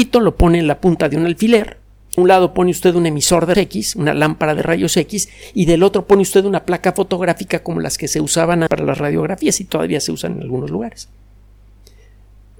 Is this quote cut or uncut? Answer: cut